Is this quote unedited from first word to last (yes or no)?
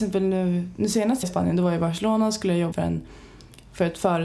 no